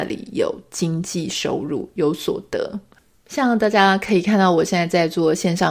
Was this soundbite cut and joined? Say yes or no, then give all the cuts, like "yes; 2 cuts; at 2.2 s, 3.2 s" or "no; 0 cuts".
no; 0 cuts